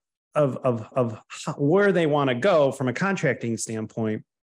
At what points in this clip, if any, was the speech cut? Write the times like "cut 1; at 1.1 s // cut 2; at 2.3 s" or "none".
cut 1; at 0.9 s